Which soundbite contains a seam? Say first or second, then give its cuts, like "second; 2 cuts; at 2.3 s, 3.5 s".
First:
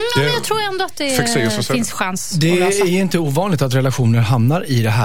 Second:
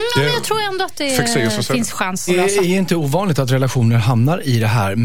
second; 1 cut; at 2.3 s